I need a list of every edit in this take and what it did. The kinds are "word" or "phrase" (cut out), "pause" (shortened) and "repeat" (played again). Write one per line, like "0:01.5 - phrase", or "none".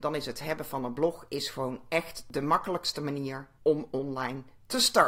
0:03.6 - pause

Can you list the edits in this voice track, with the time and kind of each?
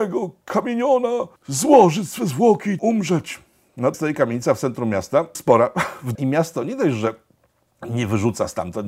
0:01.4 - pause
0:02.8 - word
0:03.9 - phrase
0:05.3 - word
0:06.1 - phrase

